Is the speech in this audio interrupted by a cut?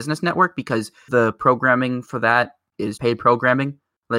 yes; 2 cuts; at 1.1 s, 3.0 s

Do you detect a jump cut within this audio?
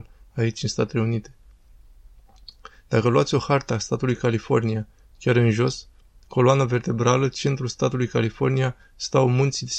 no; 0 cuts

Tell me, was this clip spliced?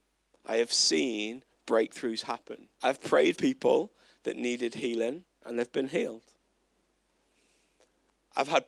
yes; 2 cuts; at 2.7 s, 3.3 s

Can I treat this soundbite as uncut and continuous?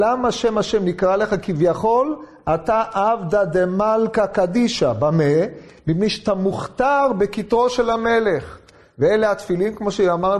yes; 0 cuts

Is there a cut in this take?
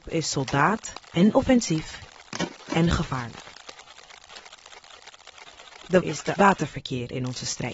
yes; 3 cuts; at 1.1 s, 6.0 s, 6.4 s

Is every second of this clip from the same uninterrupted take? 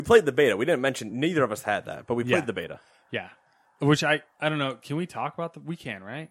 yes; 0 cuts

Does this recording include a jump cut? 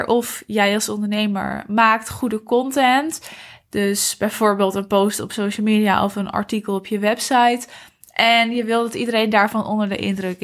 no; 0 cuts

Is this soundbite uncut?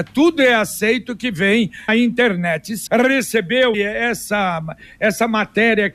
no; 3 cuts; at 1.9 s, 2.9 s, 3.7 s

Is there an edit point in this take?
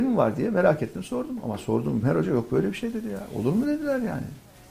yes; 1 cut; at 2.0 s

